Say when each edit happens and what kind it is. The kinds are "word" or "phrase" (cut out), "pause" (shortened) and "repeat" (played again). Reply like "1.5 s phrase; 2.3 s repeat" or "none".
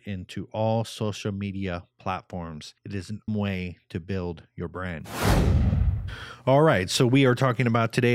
2.8 s pause; 3.3 s word